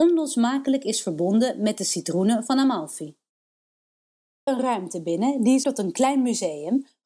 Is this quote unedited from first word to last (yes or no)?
no